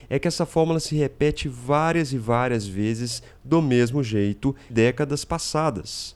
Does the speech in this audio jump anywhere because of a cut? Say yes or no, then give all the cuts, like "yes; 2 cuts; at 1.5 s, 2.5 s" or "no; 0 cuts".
yes; 1 cut; at 4.7 s